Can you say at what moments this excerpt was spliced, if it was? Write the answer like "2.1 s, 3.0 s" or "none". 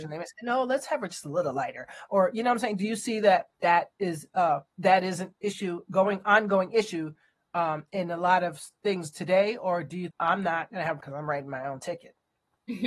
3.5 s, 4.7 s, 10.1 s, 11.0 s